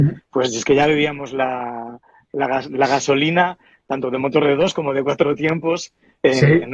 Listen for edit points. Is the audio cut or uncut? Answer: uncut